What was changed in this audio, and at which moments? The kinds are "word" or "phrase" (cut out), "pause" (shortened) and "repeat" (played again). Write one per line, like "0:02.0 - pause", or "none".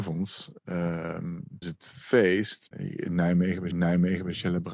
0:01.6 - word
0:02.7 - word
0:03.7 - repeat